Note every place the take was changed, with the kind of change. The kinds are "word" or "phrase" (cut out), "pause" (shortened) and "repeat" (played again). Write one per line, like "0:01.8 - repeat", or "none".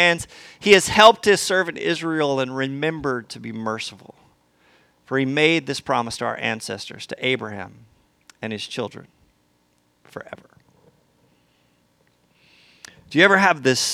none